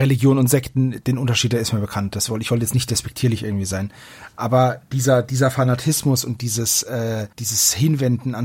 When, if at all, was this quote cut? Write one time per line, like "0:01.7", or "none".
0:07.3